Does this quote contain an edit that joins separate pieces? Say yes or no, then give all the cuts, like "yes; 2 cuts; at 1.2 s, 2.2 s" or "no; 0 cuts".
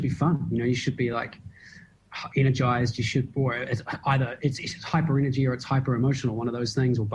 no; 0 cuts